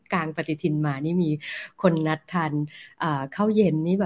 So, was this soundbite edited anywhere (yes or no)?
no